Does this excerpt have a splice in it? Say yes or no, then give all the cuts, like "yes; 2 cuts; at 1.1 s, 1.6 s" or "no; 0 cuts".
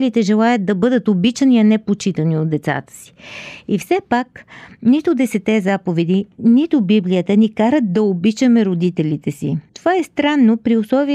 yes; 1 cut; at 9.7 s